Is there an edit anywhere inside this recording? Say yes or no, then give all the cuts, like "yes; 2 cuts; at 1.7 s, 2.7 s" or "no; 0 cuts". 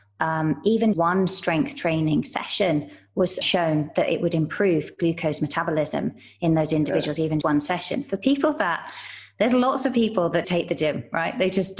yes; 4 cuts; at 0.9 s, 3.4 s, 7.4 s, 10.4 s